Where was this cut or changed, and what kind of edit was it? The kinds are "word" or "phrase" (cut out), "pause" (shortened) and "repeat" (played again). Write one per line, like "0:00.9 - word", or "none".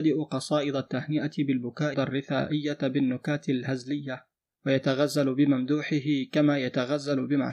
0:01.9 - phrase